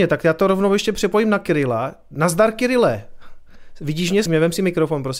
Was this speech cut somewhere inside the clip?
yes; 1 cut; at 4.3 s

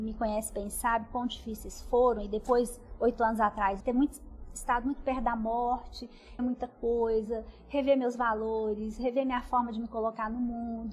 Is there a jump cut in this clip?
yes; 2 cuts; at 3.8 s, 6.4 s

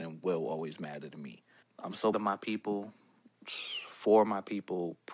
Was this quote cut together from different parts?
yes; 2 cuts; at 1.6 s, 2.1 s

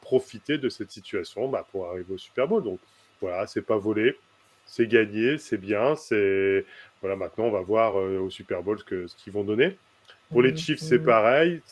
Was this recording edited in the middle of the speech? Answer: no; 0 cuts

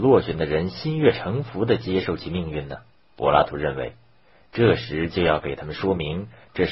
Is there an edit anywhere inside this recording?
yes; 1 cut; at 2.9 s

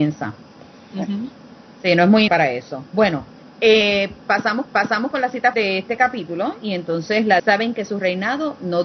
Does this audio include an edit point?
yes; 4 cuts; at 2.3 s, 4.6 s, 5.5 s, 7.4 s

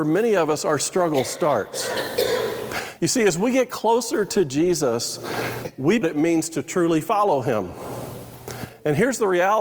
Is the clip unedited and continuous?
no; 1 cut; at 6.0 s

